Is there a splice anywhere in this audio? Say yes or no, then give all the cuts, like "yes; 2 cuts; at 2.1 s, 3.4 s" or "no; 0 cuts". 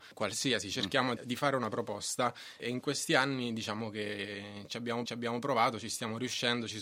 yes; 2 cuts; at 1.2 s, 5.1 s